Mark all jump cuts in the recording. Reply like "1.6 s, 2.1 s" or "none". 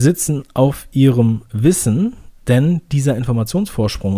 none